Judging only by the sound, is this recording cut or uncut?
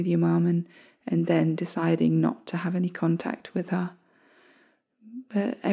uncut